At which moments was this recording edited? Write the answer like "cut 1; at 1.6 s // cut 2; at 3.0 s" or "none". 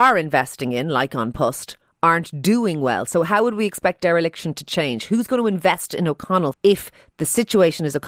cut 1; at 6.5 s